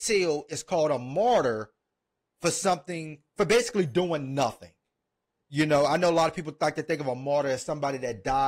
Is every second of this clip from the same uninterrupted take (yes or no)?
yes